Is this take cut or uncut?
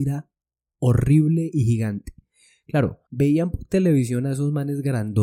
cut